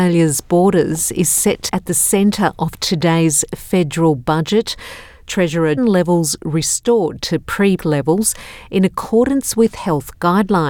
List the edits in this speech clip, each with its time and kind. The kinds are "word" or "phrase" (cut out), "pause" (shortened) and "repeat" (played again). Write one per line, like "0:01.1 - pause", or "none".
0:01.7 - word
0:05.8 - phrase
0:07.8 - word

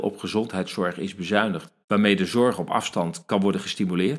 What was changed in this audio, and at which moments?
0:01.8 - pause

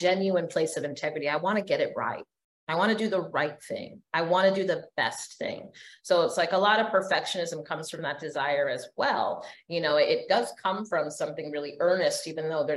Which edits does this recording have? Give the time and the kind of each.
none

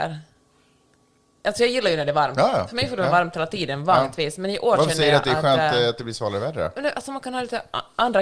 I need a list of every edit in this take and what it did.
none

